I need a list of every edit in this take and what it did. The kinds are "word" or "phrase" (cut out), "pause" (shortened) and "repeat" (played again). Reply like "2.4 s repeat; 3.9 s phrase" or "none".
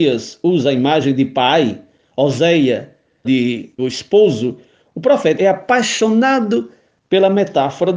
3.2 s word; 3.8 s word; 5.4 s word